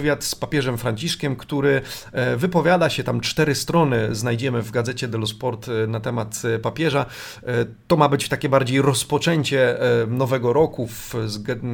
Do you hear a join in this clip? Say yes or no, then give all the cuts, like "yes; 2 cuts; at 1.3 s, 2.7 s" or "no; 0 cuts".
no; 0 cuts